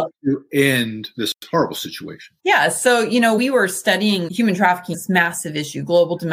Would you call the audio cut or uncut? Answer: cut